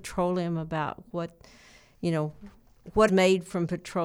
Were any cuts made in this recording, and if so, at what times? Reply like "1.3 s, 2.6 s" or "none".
3.1 s